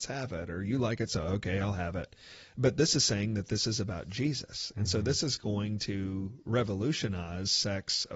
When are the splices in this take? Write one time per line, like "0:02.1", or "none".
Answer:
none